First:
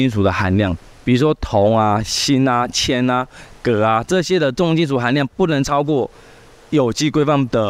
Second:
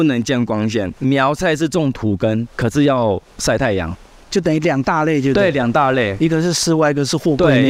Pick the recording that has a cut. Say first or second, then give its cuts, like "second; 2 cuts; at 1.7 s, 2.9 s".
second; 1 cut; at 1.0 s